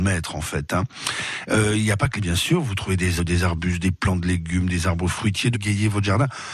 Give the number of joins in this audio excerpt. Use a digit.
3